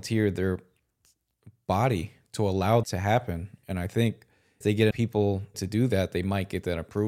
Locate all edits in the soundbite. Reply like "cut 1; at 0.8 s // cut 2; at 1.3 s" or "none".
cut 1; at 2.2 s // cut 2; at 2.8 s // cut 3; at 4.6 s // cut 4; at 4.9 s // cut 5; at 5.5 s